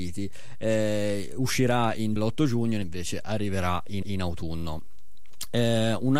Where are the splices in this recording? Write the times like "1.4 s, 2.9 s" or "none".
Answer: 2.2 s, 2.8 s, 4.0 s

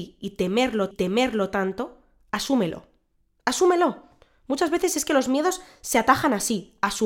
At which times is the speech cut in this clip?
0.9 s

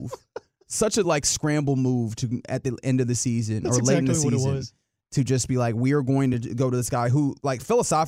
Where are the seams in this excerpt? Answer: none

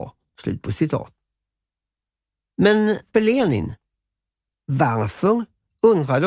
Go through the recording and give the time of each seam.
3.1 s

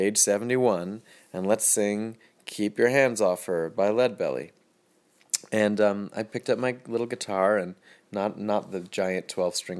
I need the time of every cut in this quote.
none

